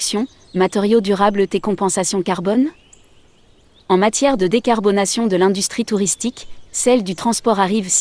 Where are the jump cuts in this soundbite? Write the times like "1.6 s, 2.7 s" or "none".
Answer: none